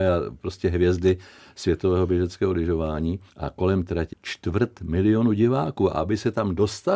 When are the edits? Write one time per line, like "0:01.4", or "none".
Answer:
0:03.3
0:04.1